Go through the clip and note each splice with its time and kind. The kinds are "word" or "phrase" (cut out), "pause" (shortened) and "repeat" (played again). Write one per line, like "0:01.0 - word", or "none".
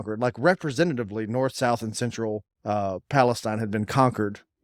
0:02.5 - pause